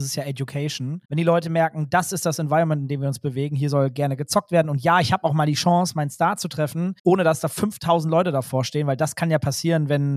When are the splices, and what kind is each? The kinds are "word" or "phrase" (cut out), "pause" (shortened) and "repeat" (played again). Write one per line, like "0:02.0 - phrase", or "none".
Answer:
0:01.0 - pause
0:07.0 - pause